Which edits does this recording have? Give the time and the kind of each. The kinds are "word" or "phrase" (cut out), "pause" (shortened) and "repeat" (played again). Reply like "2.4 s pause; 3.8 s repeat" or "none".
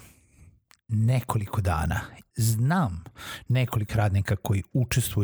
2.3 s word; 3.9 s word